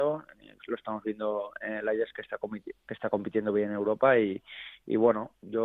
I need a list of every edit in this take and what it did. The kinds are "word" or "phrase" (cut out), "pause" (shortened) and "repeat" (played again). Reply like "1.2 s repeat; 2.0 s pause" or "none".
2.1 s word